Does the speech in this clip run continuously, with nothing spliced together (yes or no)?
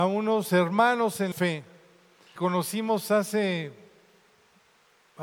no